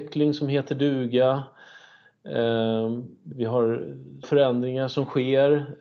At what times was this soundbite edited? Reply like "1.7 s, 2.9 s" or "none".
3.3 s, 4.2 s